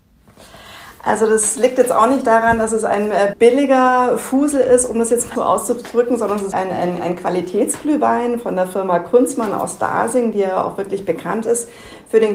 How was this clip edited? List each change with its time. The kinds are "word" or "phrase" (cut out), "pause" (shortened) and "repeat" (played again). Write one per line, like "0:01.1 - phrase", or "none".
0:03.3 - word
0:05.4 - word
0:06.5 - word